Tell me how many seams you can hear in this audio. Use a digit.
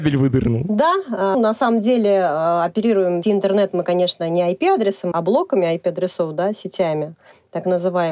3